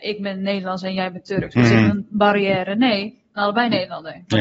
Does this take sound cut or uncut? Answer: cut